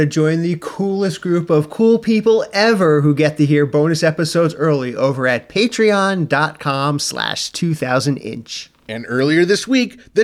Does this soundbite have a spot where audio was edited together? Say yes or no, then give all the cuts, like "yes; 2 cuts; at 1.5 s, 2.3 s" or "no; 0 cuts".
no; 0 cuts